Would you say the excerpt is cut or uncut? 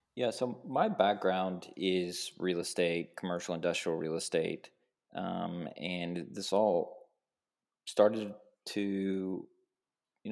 uncut